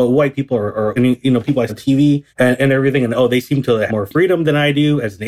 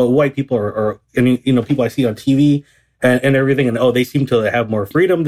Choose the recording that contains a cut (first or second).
first